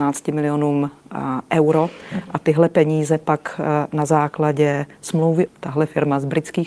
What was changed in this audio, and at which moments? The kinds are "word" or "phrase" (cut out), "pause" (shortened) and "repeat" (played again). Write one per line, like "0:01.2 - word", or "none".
0:05.5 - phrase